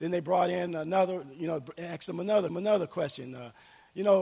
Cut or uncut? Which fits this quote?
cut